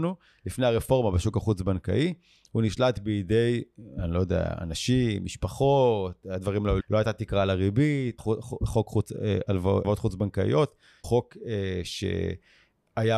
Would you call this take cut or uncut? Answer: cut